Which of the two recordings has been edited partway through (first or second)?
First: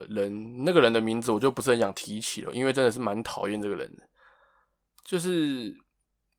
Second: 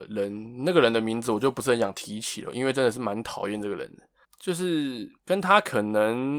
second